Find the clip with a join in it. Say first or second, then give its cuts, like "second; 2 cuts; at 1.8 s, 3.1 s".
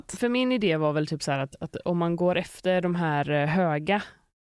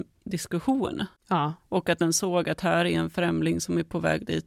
second; 1 cut; at 1.2 s